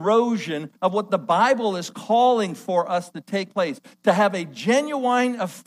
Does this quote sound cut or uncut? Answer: uncut